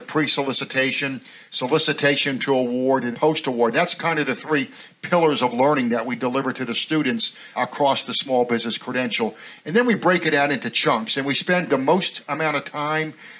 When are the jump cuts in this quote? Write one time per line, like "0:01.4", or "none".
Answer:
0:03.1
0:07.6
0:11.7

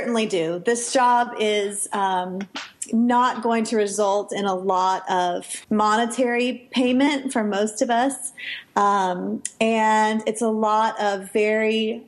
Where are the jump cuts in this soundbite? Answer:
0:05.6

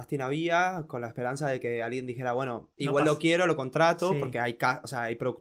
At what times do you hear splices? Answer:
0:02.7

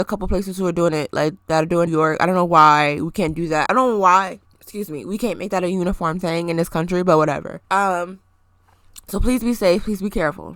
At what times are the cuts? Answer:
0:01.9
0:03.7
0:04.5
0:07.6

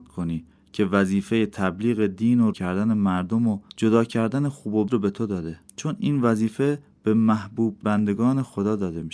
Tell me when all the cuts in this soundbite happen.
0:02.5
0:03.7
0:04.9
0:05.7
0:07.8

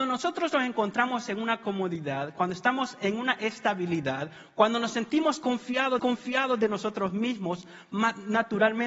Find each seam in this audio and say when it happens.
0:06.0

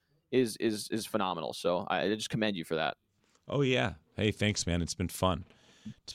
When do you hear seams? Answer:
none

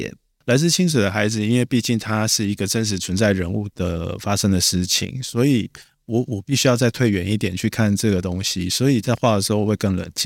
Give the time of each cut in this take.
none

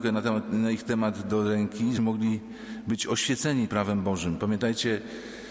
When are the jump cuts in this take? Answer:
0:02.0
0:03.7

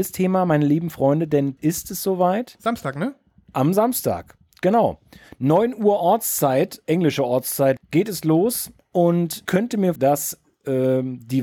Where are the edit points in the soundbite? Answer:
0:01.6
0:06.8
0:07.8
0:09.5
0:10.0

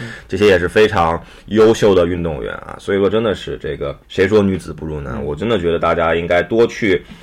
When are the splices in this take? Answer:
0:04.0

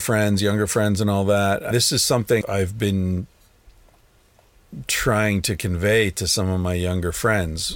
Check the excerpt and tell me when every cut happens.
0:01.7
0:02.4

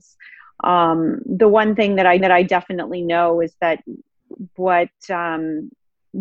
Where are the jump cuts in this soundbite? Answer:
0:02.2

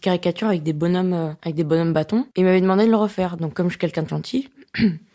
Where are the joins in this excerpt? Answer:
0:02.3
0:04.1

